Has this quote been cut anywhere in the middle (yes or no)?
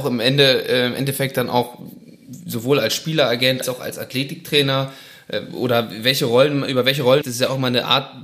yes